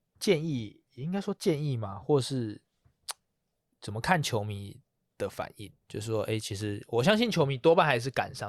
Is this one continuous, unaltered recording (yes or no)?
no